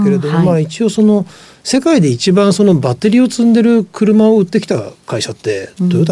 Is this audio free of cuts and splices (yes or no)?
yes